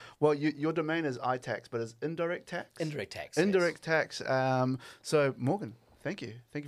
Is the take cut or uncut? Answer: uncut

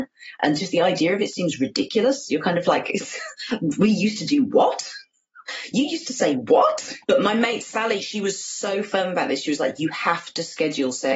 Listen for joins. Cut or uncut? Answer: cut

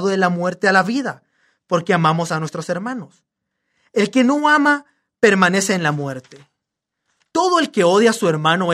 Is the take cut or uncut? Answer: uncut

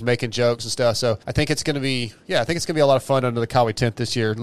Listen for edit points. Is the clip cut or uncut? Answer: cut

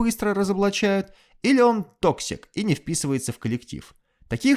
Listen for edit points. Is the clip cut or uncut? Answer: uncut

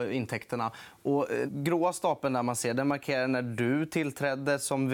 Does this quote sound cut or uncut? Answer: cut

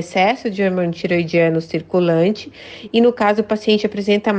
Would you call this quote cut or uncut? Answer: uncut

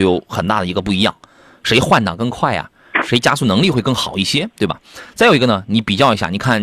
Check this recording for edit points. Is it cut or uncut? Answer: uncut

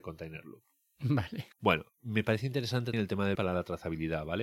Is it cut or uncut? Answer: cut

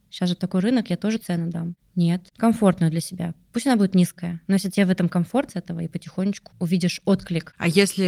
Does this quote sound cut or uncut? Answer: cut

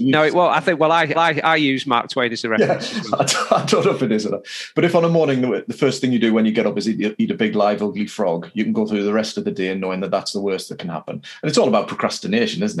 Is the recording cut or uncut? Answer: cut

